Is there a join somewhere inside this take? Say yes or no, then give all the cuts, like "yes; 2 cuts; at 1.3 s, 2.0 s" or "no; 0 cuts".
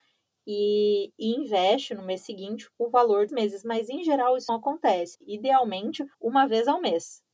yes; 5 cuts; at 2.7 s, 3.3 s, 4.5 s, 5.1 s, 6.1 s